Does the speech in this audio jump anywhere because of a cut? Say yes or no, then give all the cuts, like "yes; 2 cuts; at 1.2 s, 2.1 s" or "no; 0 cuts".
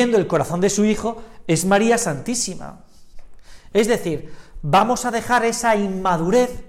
no; 0 cuts